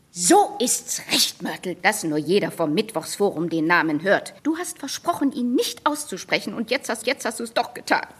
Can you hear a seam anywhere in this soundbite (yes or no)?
yes